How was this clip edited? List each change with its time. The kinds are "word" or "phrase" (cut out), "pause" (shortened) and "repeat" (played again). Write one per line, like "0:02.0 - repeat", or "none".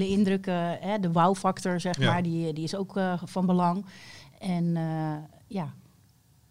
none